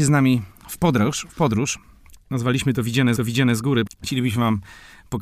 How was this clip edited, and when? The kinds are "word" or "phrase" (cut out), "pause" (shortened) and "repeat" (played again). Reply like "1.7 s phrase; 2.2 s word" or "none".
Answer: 3.2 s repeat; 3.9 s word